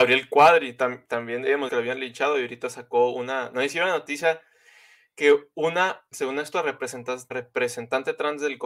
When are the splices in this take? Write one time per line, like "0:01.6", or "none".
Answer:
0:01.7
0:06.1
0:07.3